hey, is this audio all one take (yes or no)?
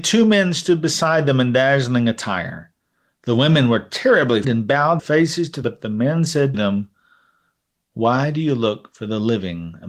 no